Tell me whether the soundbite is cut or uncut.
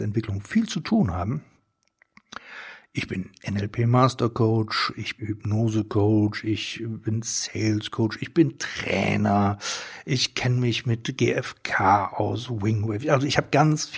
cut